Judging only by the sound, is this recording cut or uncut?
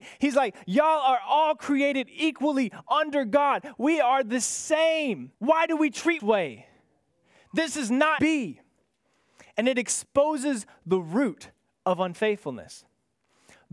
cut